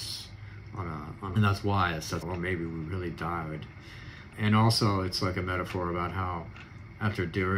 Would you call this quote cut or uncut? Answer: cut